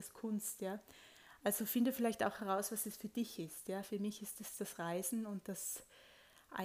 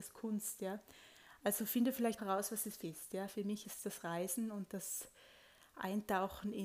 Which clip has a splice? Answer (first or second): second